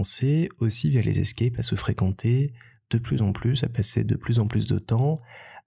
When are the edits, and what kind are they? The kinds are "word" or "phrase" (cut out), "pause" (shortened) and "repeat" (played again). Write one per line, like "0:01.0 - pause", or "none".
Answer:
none